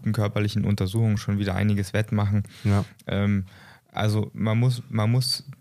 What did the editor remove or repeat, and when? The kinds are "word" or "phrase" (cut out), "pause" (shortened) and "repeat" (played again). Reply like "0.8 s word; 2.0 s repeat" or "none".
none